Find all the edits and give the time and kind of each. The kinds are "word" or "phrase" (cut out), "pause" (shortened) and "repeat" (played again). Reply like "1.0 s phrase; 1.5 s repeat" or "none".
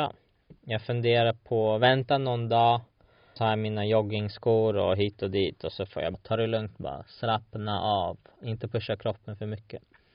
3.4 s word; 6.1 s phrase